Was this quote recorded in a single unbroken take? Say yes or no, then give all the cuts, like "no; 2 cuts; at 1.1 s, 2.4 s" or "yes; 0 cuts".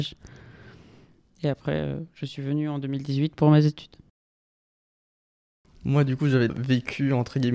no; 1 cut; at 6.5 s